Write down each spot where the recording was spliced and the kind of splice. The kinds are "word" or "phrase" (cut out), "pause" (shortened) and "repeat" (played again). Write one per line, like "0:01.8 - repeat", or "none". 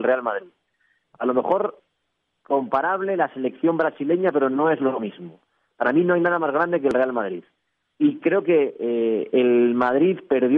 none